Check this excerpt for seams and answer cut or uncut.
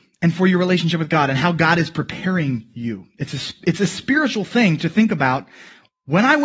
uncut